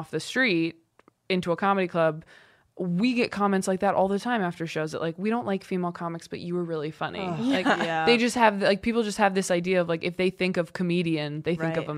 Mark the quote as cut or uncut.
uncut